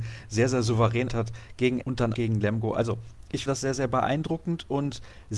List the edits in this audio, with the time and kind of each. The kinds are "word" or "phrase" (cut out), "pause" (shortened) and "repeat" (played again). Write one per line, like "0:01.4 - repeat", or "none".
0:01.1 - word
0:01.8 - word
0:02.1 - word
0:03.5 - word